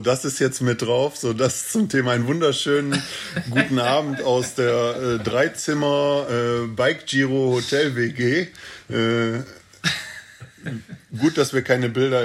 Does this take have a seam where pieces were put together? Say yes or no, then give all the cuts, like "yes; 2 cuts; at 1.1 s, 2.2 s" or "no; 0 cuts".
no; 0 cuts